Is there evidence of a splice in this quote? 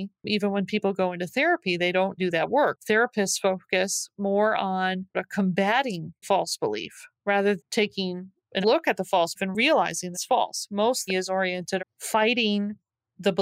yes; 9 cuts; at 2.2 s, 5.1 s, 6.2 s, 7.6 s, 8.6 s, 9.4 s, 10.1 s, 11.1 s, 11.8 s

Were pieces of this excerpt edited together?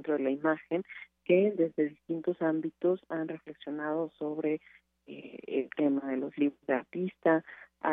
no; 0 cuts

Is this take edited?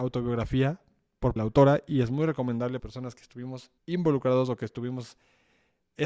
yes; 3 cuts; at 1.4 s, 2.8 s, 3.8 s

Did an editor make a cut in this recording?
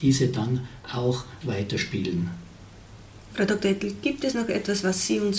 yes; 1 cut; at 1.4 s

